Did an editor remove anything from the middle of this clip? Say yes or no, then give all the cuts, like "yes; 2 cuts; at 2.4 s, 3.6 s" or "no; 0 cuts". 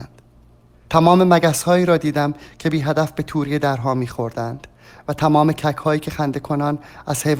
no; 0 cuts